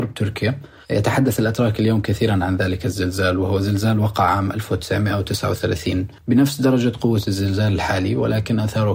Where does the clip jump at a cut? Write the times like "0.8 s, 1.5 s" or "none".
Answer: 6.2 s